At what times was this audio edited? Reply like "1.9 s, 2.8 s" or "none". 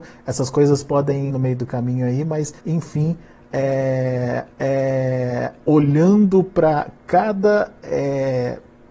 1.3 s, 2.6 s, 4.5 s